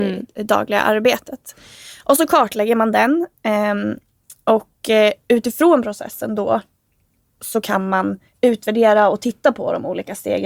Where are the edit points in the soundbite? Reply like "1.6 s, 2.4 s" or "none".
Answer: 8.3 s